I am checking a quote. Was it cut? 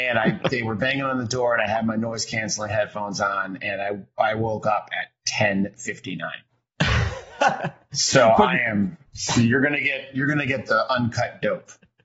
yes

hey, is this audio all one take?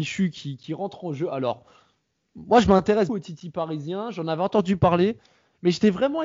no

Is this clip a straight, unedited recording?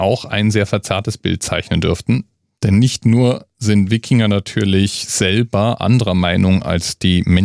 yes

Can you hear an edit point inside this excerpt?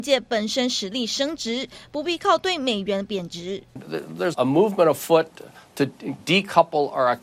yes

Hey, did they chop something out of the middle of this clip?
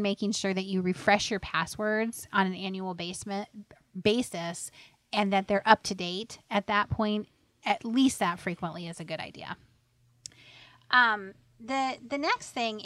no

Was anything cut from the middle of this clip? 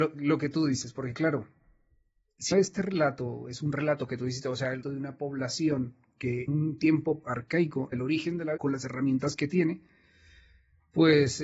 yes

